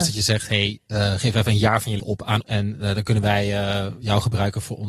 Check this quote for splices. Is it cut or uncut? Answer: cut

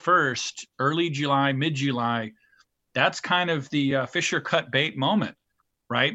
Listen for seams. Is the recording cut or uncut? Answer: uncut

